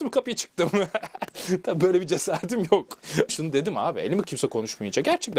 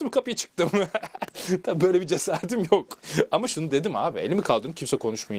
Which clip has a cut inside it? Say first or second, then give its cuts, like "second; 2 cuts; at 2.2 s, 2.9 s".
first; 2 cuts; at 3.3 s, 4.2 s